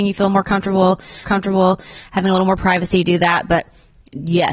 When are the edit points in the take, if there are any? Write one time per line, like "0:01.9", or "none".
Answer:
0:01.2